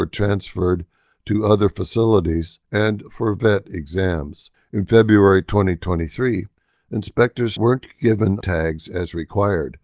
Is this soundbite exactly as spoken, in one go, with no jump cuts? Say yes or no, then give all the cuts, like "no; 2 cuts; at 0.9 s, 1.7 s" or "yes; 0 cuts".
no; 4 cuts; at 2.6 s, 4.5 s, 7.6 s, 8.4 s